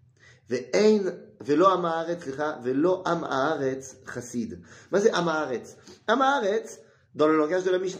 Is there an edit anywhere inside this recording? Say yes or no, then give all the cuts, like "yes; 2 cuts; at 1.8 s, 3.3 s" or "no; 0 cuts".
no; 0 cuts